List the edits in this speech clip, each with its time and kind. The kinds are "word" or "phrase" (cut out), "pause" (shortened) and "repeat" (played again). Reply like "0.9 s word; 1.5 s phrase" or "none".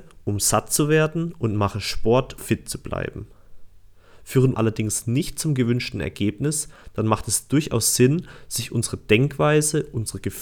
2.4 s word; 4.5 s phrase